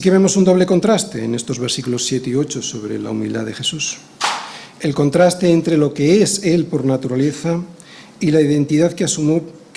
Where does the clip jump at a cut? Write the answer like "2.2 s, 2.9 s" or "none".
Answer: none